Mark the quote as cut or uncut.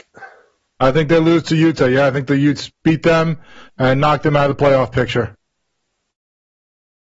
uncut